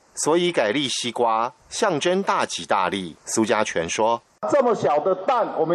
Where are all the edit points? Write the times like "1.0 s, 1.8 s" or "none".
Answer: 3.2 s